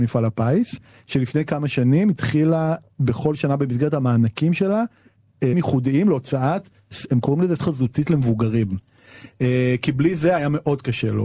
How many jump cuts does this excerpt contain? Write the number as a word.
two